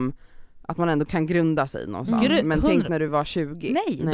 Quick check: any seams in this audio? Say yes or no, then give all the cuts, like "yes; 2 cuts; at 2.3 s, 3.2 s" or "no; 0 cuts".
no; 0 cuts